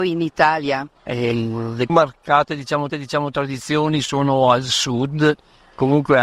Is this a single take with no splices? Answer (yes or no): no